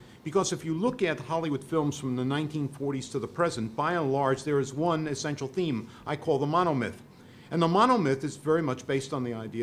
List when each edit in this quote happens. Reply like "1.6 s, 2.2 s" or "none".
none